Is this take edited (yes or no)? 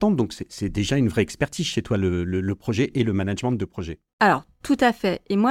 no